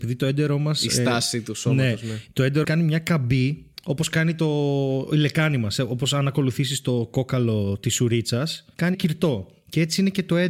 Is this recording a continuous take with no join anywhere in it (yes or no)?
no